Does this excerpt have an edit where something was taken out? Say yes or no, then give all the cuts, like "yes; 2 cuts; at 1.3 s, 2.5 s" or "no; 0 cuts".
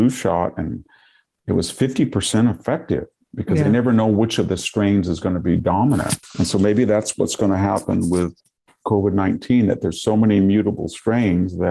no; 0 cuts